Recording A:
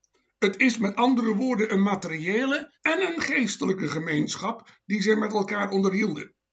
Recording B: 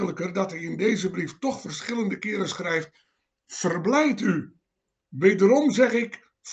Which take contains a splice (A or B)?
A